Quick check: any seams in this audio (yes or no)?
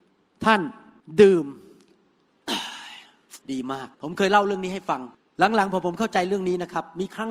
yes